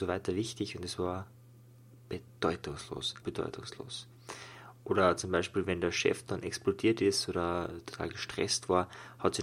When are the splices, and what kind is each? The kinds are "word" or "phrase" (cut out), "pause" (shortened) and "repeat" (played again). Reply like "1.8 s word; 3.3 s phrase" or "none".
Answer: 3.2 s word